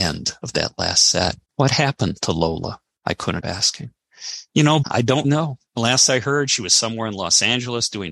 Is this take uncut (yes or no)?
no